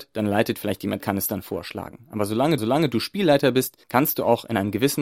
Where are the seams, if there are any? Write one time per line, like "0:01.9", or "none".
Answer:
0:01.0
0:02.6
0:03.8